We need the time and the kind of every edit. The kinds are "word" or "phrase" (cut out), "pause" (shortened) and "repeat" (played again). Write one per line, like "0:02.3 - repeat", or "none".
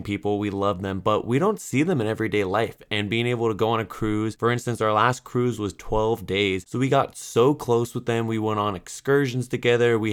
none